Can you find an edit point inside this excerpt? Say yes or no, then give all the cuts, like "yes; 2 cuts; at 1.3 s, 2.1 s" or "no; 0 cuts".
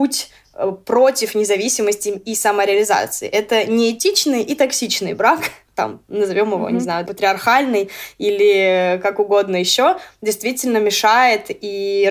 yes; 1 cut; at 7.1 s